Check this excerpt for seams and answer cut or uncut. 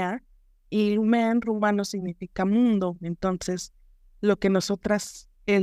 uncut